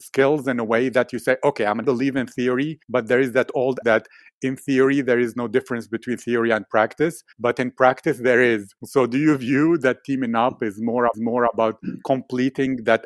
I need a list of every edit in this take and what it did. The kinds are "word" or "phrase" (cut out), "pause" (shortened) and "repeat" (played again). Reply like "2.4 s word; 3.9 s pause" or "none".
1.8 s phrase; 2.8 s pause; 3.8 s word; 7.3 s pause; 8.8 s pause; 11.1 s repeat